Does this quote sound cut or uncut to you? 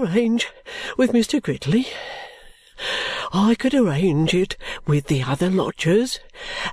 uncut